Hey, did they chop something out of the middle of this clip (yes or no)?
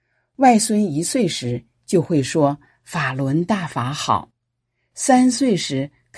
no